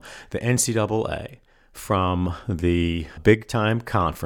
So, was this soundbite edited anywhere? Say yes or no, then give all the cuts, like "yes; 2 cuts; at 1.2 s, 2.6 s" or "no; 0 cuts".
no; 0 cuts